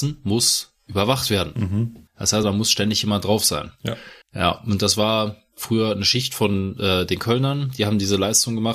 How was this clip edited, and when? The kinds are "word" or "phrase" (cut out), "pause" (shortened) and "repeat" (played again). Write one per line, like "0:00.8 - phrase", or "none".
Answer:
0:02.1 - pause
0:02.4 - word
0:04.2 - pause